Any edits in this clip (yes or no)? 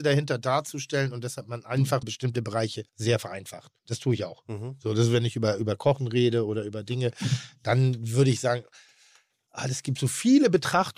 yes